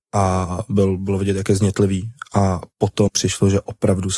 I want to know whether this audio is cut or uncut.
cut